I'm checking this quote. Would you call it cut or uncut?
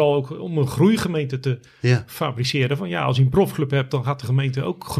uncut